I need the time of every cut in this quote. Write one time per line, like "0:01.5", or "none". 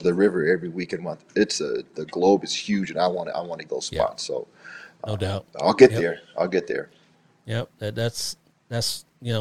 0:01.0
0:03.7
0:05.5